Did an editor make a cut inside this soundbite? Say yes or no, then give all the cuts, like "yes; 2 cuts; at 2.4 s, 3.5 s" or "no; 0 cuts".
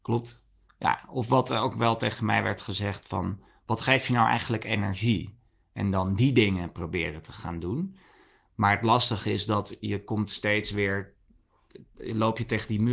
no; 0 cuts